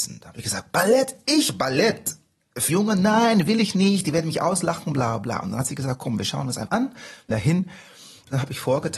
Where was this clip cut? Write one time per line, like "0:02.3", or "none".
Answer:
0:02.7
0:06.7
0:07.3